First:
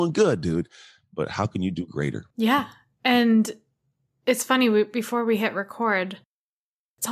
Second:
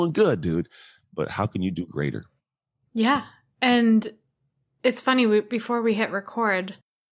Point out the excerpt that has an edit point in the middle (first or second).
first